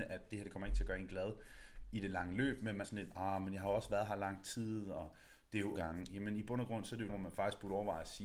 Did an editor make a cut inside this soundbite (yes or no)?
yes